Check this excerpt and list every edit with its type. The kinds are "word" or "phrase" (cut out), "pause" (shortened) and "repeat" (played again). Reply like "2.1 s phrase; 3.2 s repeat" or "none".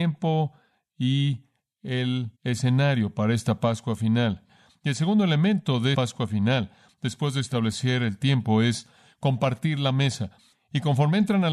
2.4 s pause; 5.9 s word